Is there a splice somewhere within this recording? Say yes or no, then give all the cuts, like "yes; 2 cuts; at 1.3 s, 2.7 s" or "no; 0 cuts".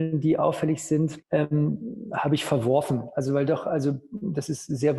yes; 1 cut; at 1.2 s